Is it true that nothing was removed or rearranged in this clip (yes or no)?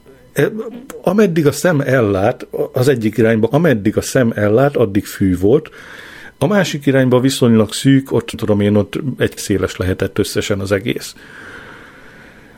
no